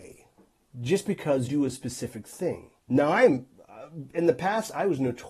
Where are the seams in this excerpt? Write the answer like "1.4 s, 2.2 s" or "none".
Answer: 1.5 s, 2.8 s